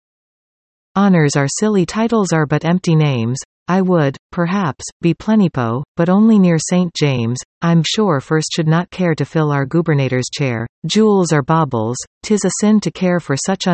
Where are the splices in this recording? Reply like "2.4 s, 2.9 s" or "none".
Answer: 1.9 s, 7.8 s, 10.7 s

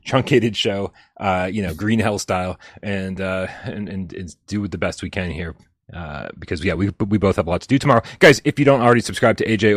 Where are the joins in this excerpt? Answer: none

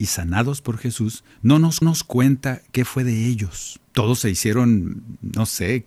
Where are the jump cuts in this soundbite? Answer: 1.3 s, 1.8 s, 3.8 s

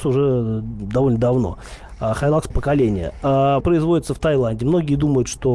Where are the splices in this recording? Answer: 2.5 s, 3.6 s

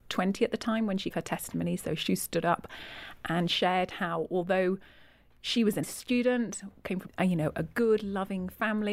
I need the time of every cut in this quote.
1.1 s, 5.8 s, 7.1 s

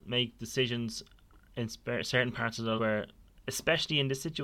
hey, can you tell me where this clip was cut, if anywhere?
2.8 s

